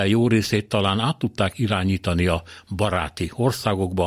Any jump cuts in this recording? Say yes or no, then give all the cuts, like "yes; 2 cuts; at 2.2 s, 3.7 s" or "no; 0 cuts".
no; 0 cuts